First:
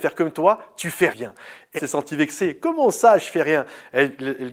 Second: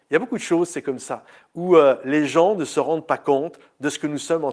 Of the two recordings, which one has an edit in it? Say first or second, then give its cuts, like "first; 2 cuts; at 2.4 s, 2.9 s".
first; 2 cuts; at 1.1 s, 1.8 s